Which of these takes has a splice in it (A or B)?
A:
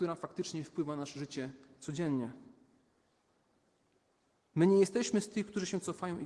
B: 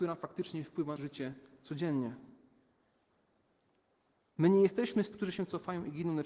B